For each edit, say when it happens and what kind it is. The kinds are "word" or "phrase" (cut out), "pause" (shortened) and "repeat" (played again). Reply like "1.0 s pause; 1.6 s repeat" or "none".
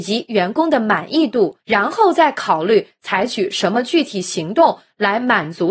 1.6 s pause